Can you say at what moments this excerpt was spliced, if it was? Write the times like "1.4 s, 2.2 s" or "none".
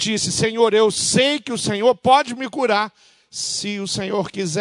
none